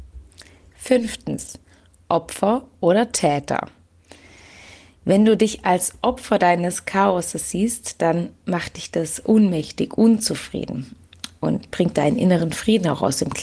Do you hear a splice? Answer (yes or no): no